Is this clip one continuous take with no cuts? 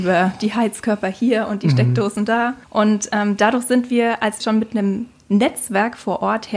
no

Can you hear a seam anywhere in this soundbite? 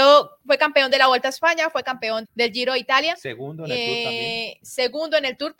yes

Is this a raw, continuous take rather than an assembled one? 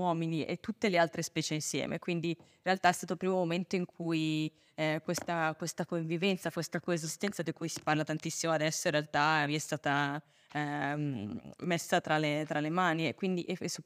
yes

